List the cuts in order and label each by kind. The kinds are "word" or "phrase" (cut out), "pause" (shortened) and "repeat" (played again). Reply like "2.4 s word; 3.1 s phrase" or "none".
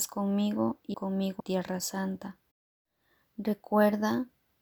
0.9 s word; 1.4 s word